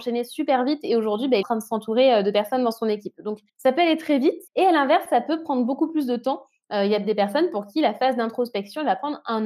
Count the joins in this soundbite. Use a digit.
3